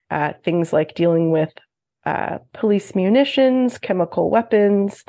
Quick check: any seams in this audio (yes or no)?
no